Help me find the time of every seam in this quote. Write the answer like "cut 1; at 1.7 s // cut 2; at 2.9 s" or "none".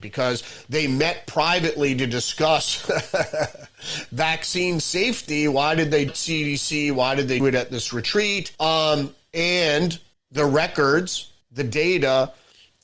cut 1; at 6.1 s // cut 2; at 7.4 s // cut 3; at 8.5 s // cut 4; at 10.1 s // cut 5; at 11.4 s

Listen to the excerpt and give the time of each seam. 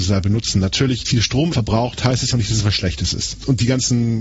cut 1; at 1.0 s // cut 2; at 1.5 s // cut 3; at 2.3 s

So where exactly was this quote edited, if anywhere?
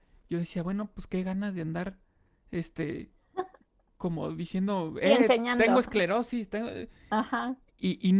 none

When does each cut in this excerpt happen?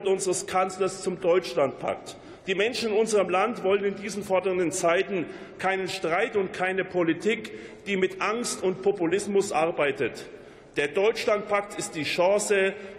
none

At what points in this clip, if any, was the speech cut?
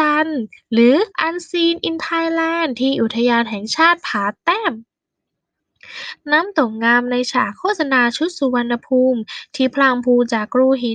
cut 1; at 1.1 s

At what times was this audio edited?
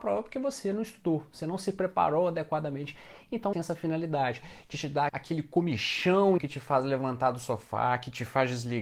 cut 1; at 3.5 s // cut 2; at 5.1 s // cut 3; at 6.4 s

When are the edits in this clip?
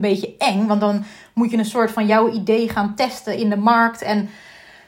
none

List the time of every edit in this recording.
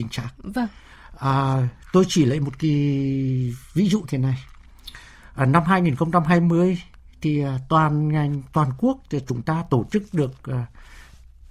none

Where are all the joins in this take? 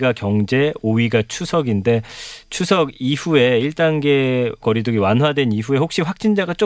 cut 1; at 4.6 s

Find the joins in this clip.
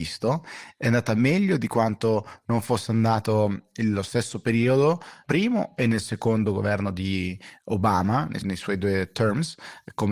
cut 1; at 5.2 s // cut 2; at 8.4 s

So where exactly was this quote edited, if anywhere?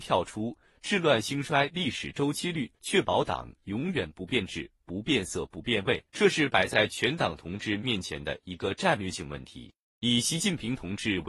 cut 1; at 2.8 s // cut 2; at 6.1 s

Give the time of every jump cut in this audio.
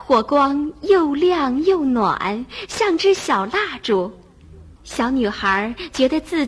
cut 1; at 4.8 s

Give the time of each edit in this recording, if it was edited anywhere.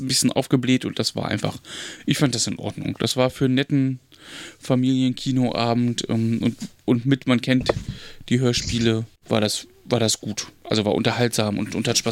cut 1; at 9.2 s

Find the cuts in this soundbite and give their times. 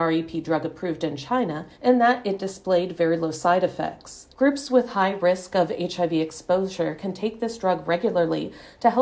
cut 1; at 1.7 s // cut 2; at 4.3 s

